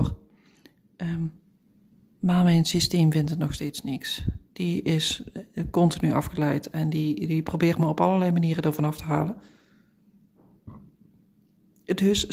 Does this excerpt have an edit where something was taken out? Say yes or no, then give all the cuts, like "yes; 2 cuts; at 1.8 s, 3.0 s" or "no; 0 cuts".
no; 0 cuts